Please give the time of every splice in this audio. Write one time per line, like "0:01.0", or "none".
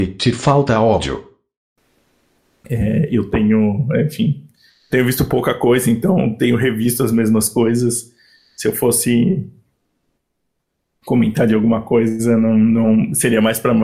none

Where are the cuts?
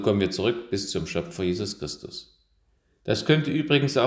none

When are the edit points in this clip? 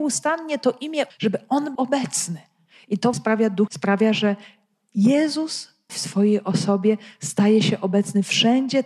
0:01.1
0:01.7
0:03.1
0:03.7
0:05.9

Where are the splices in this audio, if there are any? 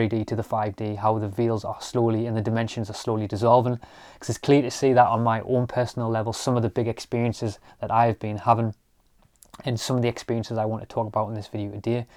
none

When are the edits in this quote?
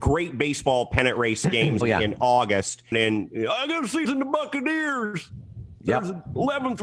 0:01.8
0:02.9
0:04.0

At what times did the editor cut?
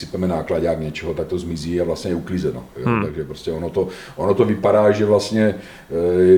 none

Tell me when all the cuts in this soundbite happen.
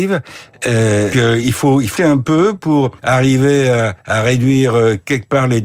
0:01.1
0:02.0
0:03.0
0:04.0

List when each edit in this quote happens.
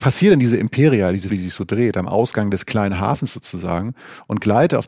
0:01.3

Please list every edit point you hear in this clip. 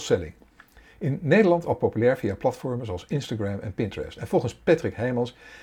none

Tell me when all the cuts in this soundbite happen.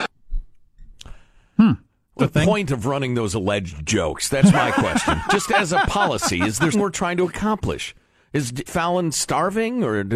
0:02.2
0:06.7
0:08.7

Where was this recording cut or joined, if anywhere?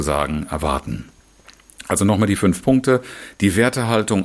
none

